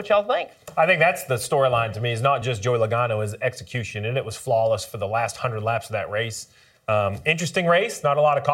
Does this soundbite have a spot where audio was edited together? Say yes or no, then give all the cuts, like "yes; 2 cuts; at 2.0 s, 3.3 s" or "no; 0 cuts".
no; 0 cuts